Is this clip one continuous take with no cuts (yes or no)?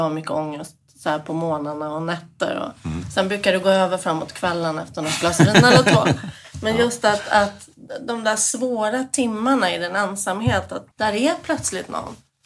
no